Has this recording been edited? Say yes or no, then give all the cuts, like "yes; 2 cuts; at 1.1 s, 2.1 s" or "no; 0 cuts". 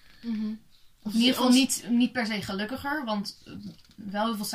yes; 1 cut; at 0.9 s